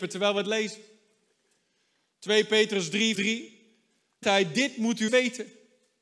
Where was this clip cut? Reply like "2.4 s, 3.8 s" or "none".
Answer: 3.1 s, 4.2 s, 5.1 s